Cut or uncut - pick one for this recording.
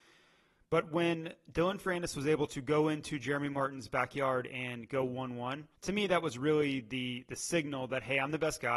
cut